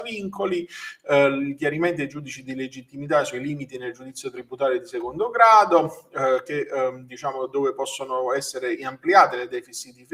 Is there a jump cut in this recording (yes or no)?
no